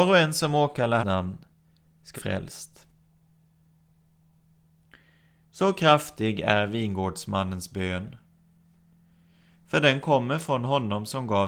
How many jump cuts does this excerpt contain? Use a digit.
2